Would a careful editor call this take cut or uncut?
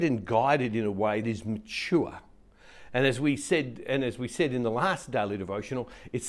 cut